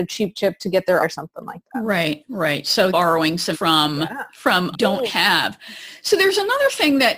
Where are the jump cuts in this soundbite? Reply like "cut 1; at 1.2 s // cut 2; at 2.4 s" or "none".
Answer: cut 1; at 1.0 s // cut 2; at 2.9 s // cut 3; at 3.5 s // cut 4; at 4.7 s